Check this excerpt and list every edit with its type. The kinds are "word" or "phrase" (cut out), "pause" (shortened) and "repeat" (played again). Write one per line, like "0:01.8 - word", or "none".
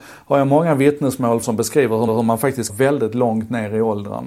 0:01.4 - phrase
0:02.1 - repeat
0:02.7 - phrase